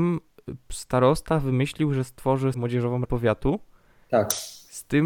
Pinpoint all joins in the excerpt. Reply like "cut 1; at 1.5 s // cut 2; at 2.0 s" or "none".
cut 1; at 2.5 s // cut 2; at 3.0 s